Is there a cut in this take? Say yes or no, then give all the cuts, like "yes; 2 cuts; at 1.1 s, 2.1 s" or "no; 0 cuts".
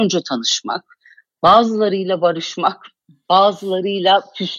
no; 0 cuts